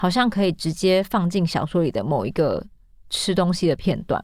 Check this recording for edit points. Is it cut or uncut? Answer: uncut